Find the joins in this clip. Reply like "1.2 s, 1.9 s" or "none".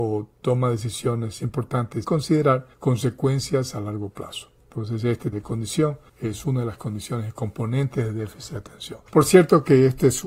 2.0 s, 2.7 s, 4.6 s, 5.3 s, 6.1 s, 9.1 s